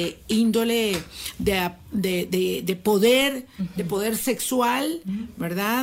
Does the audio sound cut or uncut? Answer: uncut